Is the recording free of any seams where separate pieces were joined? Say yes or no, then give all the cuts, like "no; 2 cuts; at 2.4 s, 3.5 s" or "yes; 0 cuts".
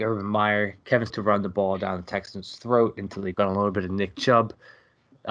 no; 2 cuts; at 1.1 s, 3.3 s